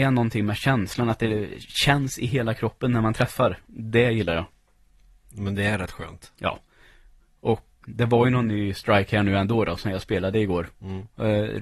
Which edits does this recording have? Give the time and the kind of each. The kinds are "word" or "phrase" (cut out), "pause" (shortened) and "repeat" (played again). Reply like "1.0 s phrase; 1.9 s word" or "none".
7.8 s word